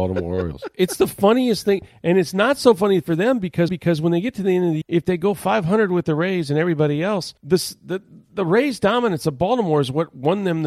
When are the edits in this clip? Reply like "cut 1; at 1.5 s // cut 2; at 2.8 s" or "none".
cut 1; at 3.7 s // cut 2; at 4.8 s // cut 3; at 7.4 s